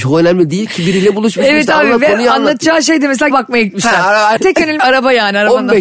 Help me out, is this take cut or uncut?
cut